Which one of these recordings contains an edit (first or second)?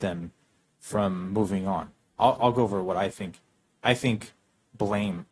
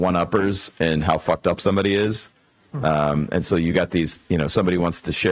first